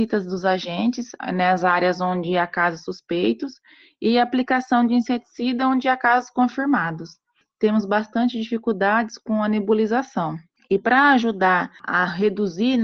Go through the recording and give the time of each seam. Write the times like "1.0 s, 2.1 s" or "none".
none

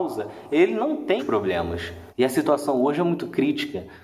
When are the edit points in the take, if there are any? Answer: 1.2 s, 2.1 s

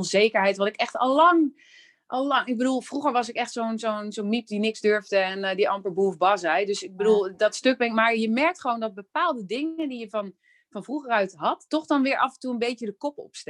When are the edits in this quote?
none

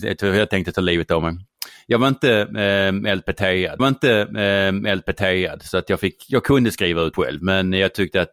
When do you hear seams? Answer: 3.8 s, 7.1 s

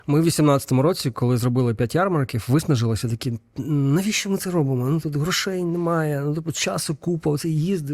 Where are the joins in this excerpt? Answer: 5.0 s

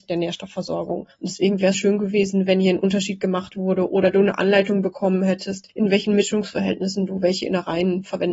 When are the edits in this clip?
1.7 s

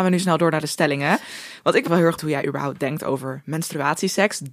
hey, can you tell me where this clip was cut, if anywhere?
1.9 s, 2.2 s

